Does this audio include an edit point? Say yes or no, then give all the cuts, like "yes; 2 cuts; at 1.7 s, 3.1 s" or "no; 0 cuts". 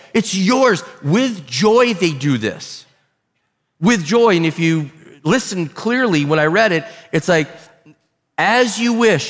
no; 0 cuts